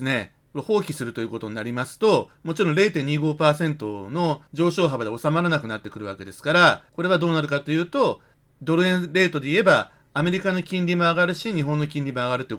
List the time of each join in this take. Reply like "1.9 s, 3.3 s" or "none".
4.5 s, 6.9 s